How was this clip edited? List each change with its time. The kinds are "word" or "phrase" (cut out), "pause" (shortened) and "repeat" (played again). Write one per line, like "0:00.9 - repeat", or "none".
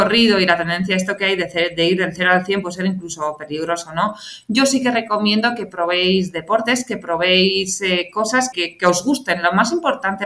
0:08.5 - word